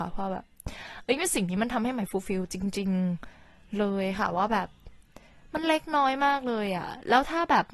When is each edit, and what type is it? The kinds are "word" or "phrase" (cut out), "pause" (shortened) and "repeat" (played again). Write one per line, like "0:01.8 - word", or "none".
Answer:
none